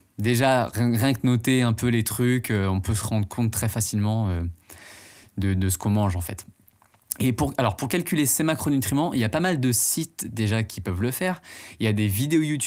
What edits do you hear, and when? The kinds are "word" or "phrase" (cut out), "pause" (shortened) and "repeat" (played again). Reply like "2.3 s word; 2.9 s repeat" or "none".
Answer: none